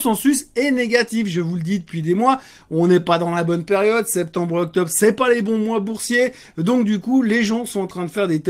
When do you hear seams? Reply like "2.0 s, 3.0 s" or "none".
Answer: none